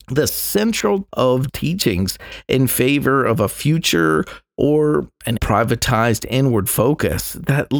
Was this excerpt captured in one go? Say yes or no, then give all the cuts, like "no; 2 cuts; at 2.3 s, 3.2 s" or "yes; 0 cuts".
no; 3 cuts; at 1.1 s, 1.5 s, 5.4 s